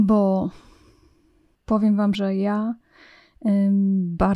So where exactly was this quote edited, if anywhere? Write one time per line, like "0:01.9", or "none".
0:02.1